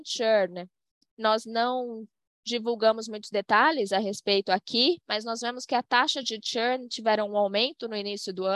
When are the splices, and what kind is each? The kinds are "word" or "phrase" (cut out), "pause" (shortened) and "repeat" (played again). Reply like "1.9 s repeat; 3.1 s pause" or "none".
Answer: none